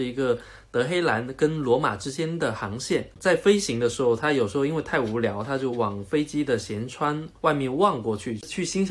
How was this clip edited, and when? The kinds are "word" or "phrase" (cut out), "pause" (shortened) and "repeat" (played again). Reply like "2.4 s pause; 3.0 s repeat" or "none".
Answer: 7.4 s pause